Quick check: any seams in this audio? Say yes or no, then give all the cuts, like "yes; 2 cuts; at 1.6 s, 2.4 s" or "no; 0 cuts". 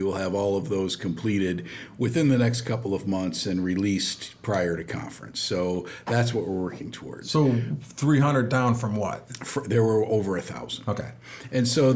no; 0 cuts